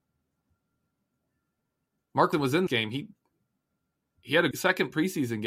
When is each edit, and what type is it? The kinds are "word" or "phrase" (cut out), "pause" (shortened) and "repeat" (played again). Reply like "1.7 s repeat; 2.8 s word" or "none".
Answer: 2.3 s word; 2.7 s word; 4.5 s word